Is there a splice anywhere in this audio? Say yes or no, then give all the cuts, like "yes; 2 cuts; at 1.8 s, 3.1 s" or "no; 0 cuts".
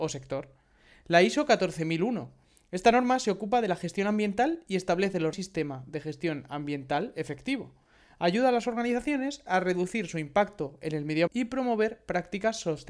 yes; 2 cuts; at 5.3 s, 11.3 s